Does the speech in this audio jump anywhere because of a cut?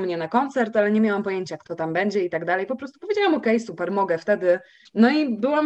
no; 0 cuts

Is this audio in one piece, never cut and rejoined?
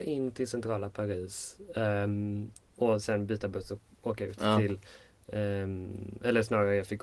yes; 0 cuts

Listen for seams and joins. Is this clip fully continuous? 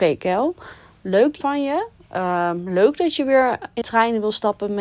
no; 2 cuts; at 1.4 s, 3.8 s

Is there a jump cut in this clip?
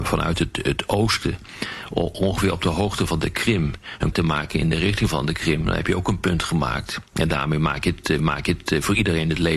yes; 2 cuts; at 4.1 s, 8.2 s

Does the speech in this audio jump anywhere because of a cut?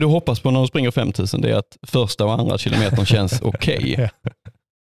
no; 0 cuts

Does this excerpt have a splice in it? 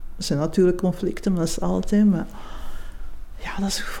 no; 0 cuts

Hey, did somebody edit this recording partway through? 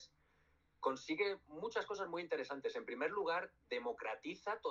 no; 0 cuts

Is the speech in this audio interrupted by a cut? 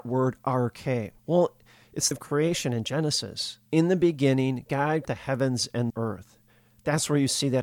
yes; 5 cuts; at 1.2 s, 2.1 s, 3.7 s, 5.0 s, 5.9 s

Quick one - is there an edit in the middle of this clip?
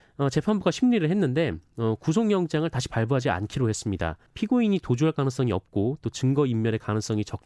yes; 1 cut; at 4.3 s

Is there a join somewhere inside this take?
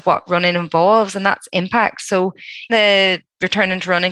yes; 1 cut; at 2.7 s

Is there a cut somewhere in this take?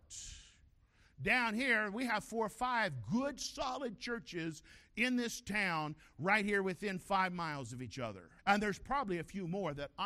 yes; 1 cut; at 8.4 s

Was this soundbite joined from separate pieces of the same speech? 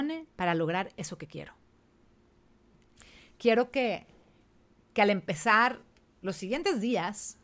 no; 0 cuts

